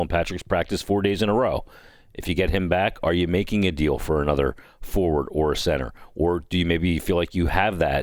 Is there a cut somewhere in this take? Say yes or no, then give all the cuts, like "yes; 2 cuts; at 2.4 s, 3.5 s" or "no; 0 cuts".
no; 0 cuts